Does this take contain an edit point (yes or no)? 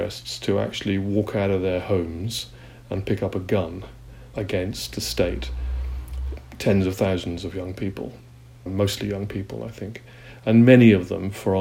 yes